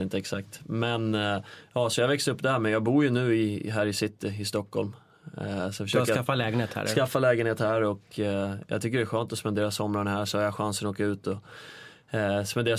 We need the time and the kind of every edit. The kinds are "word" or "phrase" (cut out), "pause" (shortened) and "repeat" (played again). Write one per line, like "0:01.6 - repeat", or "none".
none